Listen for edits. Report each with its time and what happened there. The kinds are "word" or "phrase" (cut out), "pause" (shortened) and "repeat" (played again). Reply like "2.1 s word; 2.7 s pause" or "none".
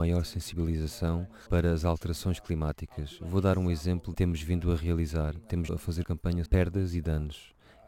1.5 s pause; 4.1 s phrase; 5.7 s word; 6.0 s word; 6.5 s word